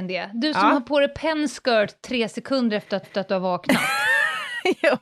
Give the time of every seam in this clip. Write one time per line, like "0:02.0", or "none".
0:03.0